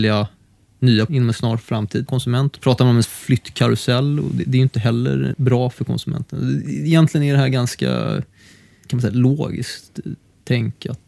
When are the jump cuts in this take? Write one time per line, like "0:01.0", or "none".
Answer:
0:01.1
0:02.1
0:02.6
0:03.0
0:05.3